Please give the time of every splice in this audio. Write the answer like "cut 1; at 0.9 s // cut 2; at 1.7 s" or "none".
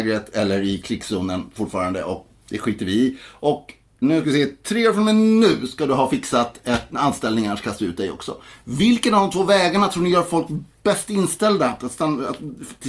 none